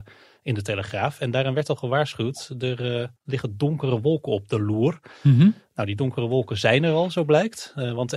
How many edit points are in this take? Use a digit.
1